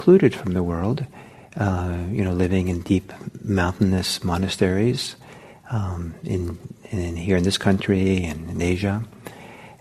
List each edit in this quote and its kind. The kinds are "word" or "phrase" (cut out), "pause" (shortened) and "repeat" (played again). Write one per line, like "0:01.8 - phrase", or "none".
none